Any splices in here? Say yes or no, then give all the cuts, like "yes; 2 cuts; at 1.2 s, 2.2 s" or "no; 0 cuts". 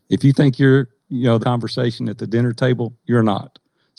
yes; 1 cut; at 1.4 s